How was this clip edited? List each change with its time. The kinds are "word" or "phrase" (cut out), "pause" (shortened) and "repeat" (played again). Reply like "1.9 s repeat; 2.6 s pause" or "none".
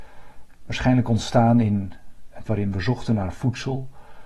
2.5 s word